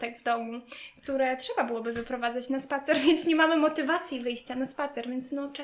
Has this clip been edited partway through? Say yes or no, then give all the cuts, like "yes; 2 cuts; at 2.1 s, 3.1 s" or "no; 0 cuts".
no; 0 cuts